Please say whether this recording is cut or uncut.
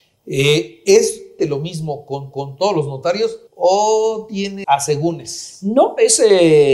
cut